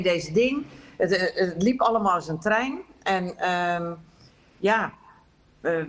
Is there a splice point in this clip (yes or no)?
no